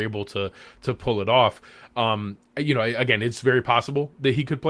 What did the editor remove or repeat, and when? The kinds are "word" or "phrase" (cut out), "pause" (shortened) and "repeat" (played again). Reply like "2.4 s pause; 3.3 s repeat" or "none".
none

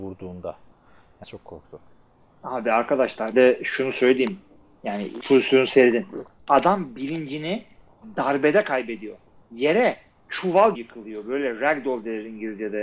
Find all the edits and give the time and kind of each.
1.2 s word; 3.3 s word; 5.2 s word; 10.8 s word

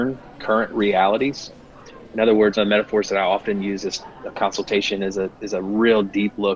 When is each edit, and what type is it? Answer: 2.6 s word; 4.3 s phrase

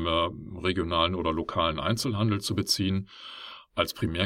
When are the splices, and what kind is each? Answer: none

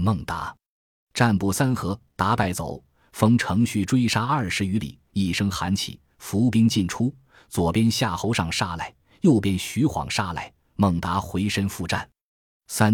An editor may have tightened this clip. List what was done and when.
none

